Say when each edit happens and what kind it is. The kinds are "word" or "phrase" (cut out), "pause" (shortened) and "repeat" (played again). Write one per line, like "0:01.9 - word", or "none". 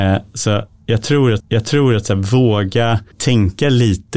0:01.4 - repeat
0:03.1 - pause

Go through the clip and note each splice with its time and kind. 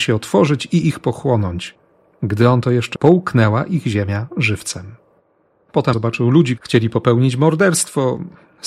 0:03.0 - word
0:05.9 - word
0:06.6 - word

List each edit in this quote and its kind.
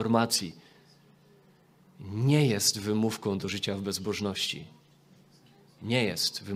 none

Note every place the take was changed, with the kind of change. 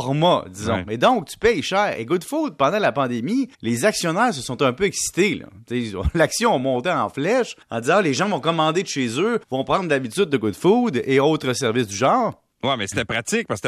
0:03.5 - pause
0:07.6 - pause
0:09.4 - pause
0:12.5 - pause

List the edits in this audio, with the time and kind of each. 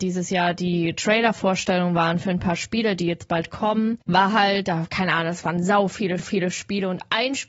0:04.0 - pause
0:06.2 - repeat

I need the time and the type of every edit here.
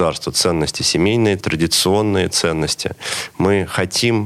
0:01.4 - word

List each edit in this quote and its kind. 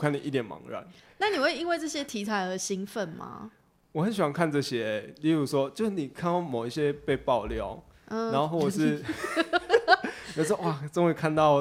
none

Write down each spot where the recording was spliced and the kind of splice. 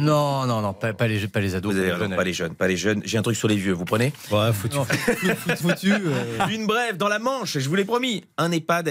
0:05.6 - word

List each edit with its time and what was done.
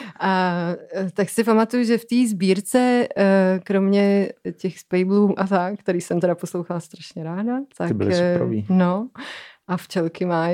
0:05.4 - word

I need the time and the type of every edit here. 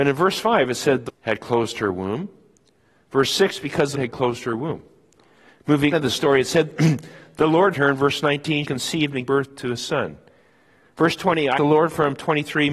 0:01.1 - word
0:03.9 - word
0:05.9 - word
0:07.7 - word
0:08.6 - word
0:09.3 - word
0:11.6 - word

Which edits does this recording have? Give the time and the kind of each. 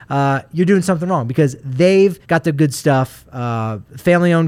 0:02.2 - pause

